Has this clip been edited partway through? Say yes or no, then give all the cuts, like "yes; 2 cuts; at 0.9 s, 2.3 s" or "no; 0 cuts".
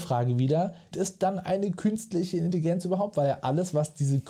yes; 1 cut; at 0.9 s